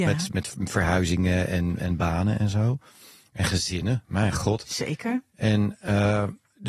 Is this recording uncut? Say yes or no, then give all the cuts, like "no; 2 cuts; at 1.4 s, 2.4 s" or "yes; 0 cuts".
yes; 0 cuts